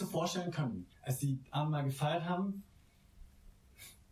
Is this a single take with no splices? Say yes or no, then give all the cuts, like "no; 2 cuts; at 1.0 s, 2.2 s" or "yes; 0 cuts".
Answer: no; 1 cut; at 0.9 s